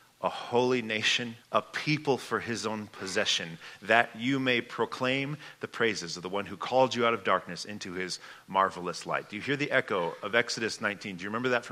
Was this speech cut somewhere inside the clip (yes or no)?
yes